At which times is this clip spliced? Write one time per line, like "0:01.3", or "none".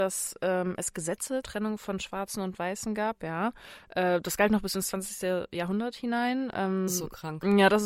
0:01.4
0:06.9